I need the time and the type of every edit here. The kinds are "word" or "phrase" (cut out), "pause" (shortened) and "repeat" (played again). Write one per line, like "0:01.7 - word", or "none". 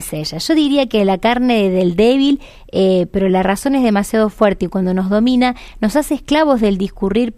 none